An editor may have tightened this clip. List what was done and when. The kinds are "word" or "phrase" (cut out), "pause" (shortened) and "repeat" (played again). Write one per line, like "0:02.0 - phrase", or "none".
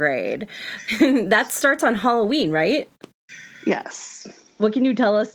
none